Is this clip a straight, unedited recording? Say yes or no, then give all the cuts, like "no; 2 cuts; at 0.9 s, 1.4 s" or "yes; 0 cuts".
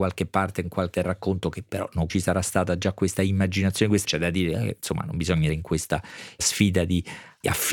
no; 4 cuts; at 0.9 s, 2.1 s, 4.0 s, 5.5 s